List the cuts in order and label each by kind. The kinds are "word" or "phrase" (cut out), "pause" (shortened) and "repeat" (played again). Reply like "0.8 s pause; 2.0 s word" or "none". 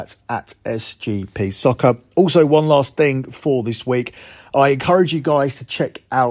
none